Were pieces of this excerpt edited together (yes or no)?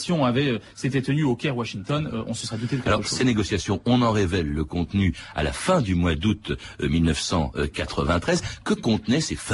no